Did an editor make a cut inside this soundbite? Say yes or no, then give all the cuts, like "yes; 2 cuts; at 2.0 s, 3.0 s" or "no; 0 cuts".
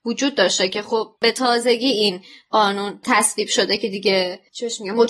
no; 0 cuts